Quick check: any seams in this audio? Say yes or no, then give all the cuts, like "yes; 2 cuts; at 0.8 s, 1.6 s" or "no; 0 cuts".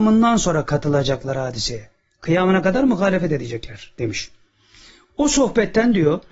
no; 0 cuts